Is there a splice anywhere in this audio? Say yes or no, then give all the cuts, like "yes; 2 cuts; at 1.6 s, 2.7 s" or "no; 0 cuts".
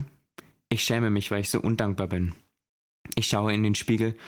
no; 0 cuts